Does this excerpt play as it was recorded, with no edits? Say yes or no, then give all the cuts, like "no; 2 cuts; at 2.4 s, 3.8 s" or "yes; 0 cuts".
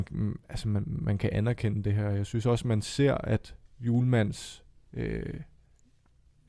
yes; 0 cuts